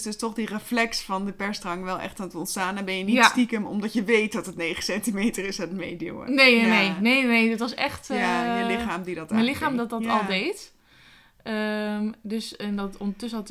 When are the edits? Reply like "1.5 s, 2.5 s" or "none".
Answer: none

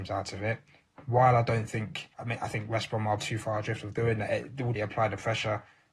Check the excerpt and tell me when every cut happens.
2.1 s, 3.2 s, 4.8 s

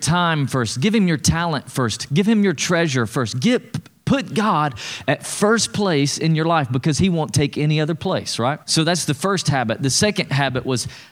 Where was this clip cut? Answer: 8.6 s

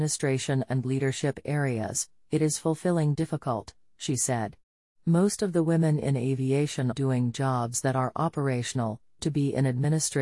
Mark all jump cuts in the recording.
3.1 s, 6.9 s, 9.2 s

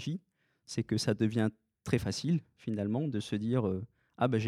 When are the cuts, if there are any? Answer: none

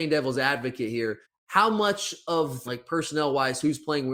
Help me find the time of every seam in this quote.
1.2 s, 2.6 s

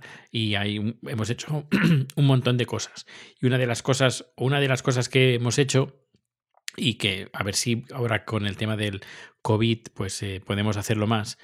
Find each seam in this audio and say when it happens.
none

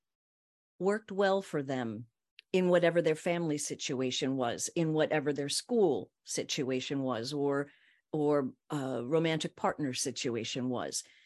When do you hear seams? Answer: none

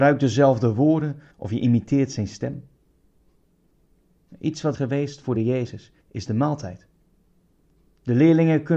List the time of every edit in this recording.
1.3 s, 4.7 s, 5.3 s, 6.0 s

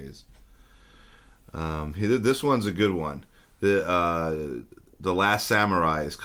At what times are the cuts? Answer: none

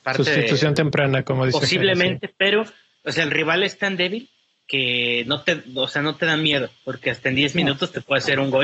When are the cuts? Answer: none

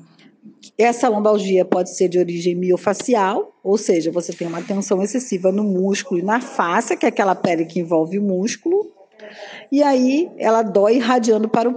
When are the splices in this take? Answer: none

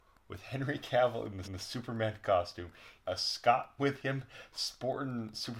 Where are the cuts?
1.4 s, 3.0 s, 3.8 s

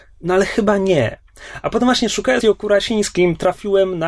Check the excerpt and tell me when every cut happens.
2.4 s

